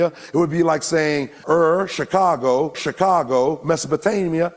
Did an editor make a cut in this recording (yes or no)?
yes